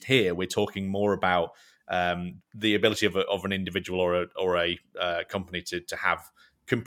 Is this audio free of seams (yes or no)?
no